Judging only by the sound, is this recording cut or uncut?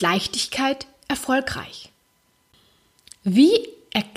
uncut